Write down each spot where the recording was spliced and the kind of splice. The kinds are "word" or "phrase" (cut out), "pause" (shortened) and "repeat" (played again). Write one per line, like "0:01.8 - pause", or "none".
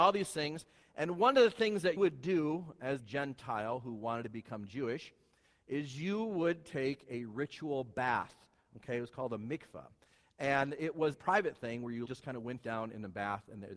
0:02.0 - word
0:03.0 - word
0:11.1 - word
0:12.1 - word